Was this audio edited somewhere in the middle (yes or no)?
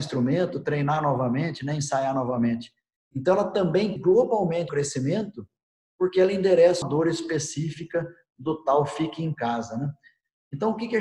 yes